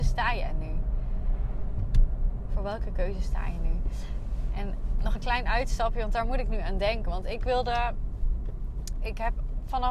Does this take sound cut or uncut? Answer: cut